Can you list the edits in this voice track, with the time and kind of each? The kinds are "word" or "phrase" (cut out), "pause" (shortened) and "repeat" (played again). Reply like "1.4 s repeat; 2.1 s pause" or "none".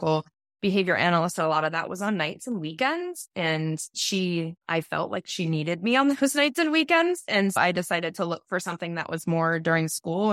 4.6 s pause; 7.6 s word